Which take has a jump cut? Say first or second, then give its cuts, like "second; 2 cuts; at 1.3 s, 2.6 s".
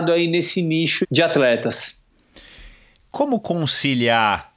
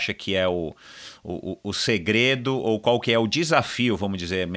first; 1 cut; at 1.0 s